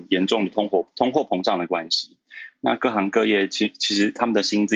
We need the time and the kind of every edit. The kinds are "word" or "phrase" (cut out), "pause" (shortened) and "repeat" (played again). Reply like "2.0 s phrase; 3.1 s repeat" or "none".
0.9 s pause